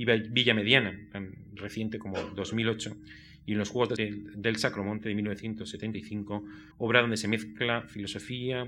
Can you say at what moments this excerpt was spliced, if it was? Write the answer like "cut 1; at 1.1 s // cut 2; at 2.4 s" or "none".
cut 1; at 4.0 s // cut 2; at 6.7 s